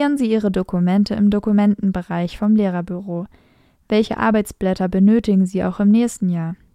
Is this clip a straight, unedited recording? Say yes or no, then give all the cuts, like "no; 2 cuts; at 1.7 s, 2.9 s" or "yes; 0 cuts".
yes; 0 cuts